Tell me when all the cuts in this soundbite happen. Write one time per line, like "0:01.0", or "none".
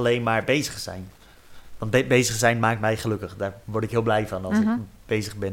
0:03.6